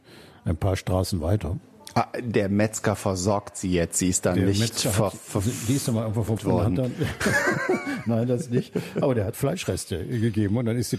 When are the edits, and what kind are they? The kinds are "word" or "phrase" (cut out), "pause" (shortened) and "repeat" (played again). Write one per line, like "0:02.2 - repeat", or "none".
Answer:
0:06.4 - word
0:09.3 - word